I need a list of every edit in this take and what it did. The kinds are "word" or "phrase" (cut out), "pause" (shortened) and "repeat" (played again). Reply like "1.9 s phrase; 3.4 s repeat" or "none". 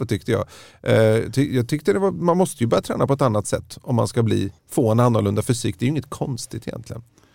4.6 s pause